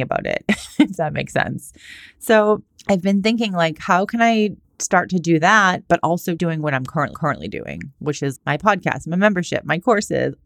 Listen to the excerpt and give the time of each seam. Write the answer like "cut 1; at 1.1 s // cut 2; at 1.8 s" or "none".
cut 1; at 2.7 s // cut 2; at 4.6 s // cut 3; at 6.4 s // cut 4; at 7.1 s // cut 5; at 8.4 s

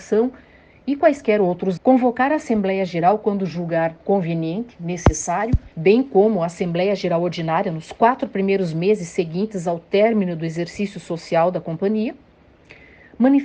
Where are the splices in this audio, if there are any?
cut 1; at 1.8 s // cut 2; at 4.0 s // cut 3; at 5.7 s

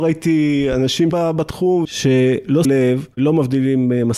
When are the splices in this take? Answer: cut 1; at 1.1 s // cut 2; at 1.8 s // cut 3; at 2.6 s

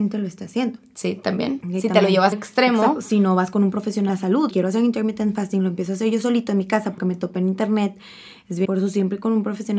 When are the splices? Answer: cut 1; at 2.3 s // cut 2; at 4.1 s // cut 3; at 4.5 s // cut 4; at 7.0 s // cut 5; at 8.6 s

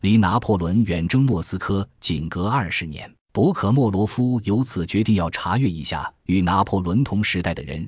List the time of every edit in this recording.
cut 1; at 3.2 s

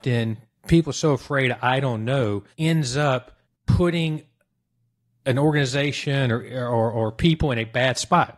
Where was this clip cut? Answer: cut 1; at 2.5 s // cut 2; at 3.4 s

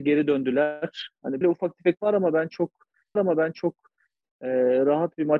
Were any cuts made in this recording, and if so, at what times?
cut 1; at 1.4 s // cut 2; at 2.0 s // cut 3; at 3.2 s

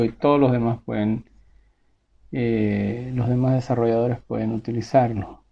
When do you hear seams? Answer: none

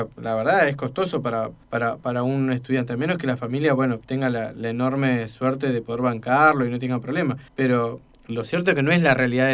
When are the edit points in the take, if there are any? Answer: cut 1; at 1.6 s // cut 2; at 7.5 s

